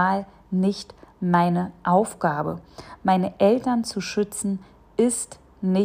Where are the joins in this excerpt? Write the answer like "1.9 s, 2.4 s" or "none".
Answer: none